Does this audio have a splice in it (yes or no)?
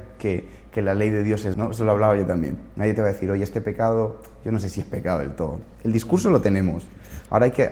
yes